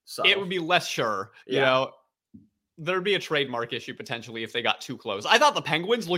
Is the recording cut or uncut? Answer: cut